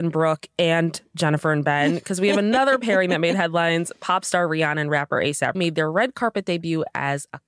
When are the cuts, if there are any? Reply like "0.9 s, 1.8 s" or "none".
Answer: 5.5 s